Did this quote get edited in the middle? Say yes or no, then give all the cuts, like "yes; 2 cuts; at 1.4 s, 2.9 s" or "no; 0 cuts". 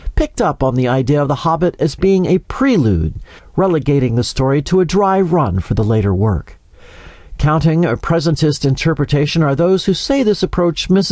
no; 0 cuts